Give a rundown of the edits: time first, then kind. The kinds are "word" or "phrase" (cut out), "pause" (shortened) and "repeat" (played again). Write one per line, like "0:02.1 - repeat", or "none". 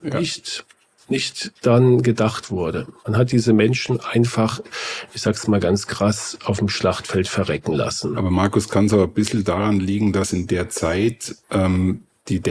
0:11.4 - pause